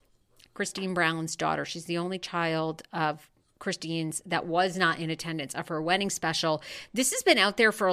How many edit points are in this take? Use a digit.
0